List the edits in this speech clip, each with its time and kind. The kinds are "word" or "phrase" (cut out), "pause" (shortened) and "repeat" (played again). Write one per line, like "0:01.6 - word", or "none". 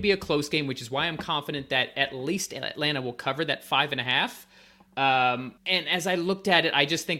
0:05.6 - pause